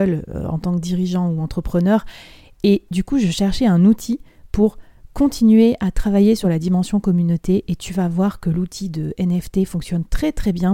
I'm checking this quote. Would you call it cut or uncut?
uncut